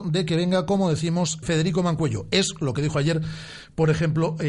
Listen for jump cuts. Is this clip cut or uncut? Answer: cut